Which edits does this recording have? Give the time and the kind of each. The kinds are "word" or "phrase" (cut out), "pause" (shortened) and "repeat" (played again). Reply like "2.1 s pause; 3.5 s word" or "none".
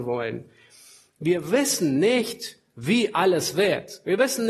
none

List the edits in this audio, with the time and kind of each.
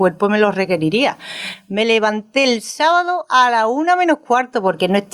none

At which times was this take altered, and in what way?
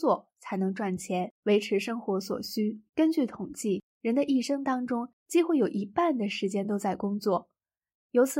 1.4 s pause; 2.9 s pause; 3.9 s pause; 5.2 s pause

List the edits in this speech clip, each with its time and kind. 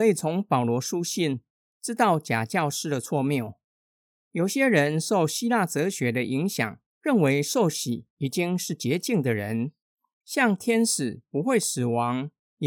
6.9 s pause; 8.1 s pause

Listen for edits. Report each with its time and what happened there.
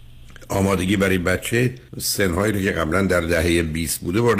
1.9 s pause

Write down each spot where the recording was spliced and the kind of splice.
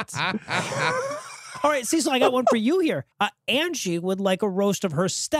3.1 s pause

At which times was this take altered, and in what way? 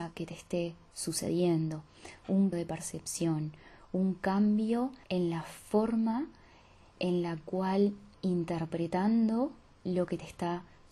2.5 s word; 5.0 s pause; 8.1 s word

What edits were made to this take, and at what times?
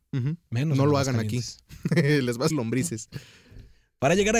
2.5 s word

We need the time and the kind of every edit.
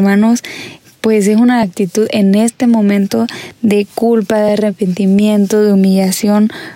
none

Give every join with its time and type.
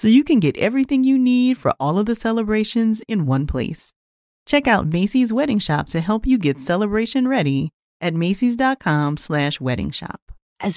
none

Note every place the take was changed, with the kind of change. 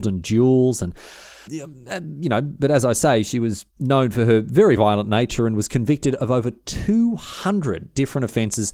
1.5 s word; 3.7 s pause; 4.8 s word

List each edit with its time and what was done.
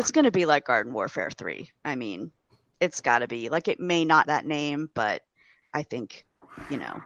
4.2 s word

